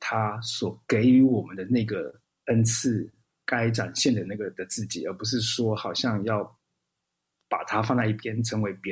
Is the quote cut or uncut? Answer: uncut